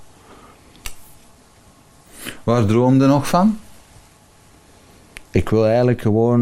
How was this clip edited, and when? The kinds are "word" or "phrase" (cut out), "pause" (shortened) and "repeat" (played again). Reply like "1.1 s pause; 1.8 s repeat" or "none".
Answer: 5.2 s pause